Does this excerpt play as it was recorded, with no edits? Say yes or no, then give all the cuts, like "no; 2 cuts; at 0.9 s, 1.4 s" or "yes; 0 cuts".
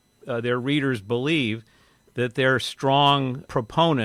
yes; 0 cuts